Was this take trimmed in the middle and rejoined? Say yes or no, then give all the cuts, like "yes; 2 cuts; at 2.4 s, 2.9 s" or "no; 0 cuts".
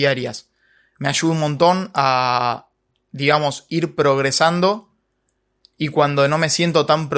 no; 0 cuts